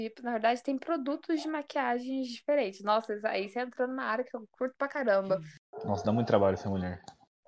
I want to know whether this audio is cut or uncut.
uncut